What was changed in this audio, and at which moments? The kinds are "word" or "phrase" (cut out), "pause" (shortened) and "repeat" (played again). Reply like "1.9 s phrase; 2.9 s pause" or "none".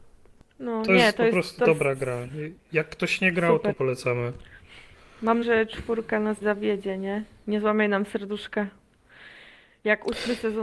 1.6 s word; 3.7 s word; 5.4 s word; 6.4 s word